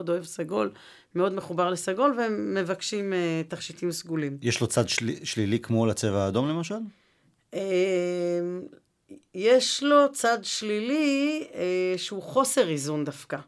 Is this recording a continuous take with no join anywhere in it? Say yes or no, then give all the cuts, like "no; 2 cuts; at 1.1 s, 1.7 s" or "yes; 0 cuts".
yes; 0 cuts